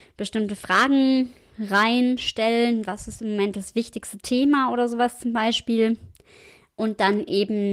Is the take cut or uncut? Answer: uncut